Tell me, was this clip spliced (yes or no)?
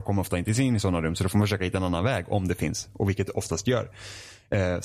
no